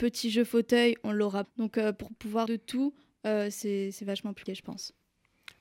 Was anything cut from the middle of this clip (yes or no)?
yes